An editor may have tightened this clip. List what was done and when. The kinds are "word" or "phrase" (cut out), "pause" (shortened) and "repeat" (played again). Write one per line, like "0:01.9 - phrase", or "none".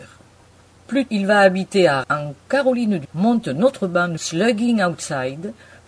0:01.1 - word
0:02.0 - word
0:03.0 - word
0:04.2 - word